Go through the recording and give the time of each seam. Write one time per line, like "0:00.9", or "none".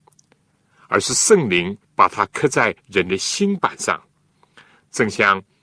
0:01.8
0:02.8